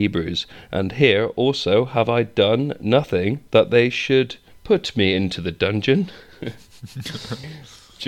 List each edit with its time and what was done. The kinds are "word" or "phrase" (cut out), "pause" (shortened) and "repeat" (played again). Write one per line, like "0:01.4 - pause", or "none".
0:04.5 - pause